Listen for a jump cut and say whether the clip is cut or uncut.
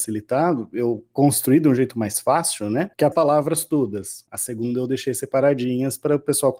cut